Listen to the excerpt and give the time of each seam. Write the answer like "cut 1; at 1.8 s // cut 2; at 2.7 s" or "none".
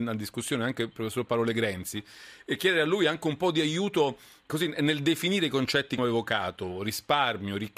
cut 1; at 6.0 s